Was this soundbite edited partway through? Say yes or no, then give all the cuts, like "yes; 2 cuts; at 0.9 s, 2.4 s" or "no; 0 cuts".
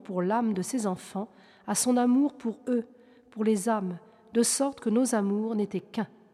no; 0 cuts